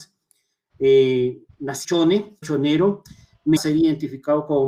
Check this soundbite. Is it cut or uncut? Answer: cut